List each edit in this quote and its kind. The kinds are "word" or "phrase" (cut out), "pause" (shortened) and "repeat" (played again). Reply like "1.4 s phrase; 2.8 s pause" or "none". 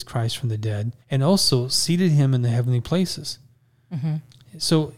1.0 s pause